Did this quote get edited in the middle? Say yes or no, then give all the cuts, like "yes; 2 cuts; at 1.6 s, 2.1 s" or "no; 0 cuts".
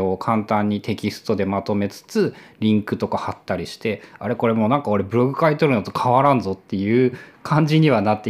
no; 0 cuts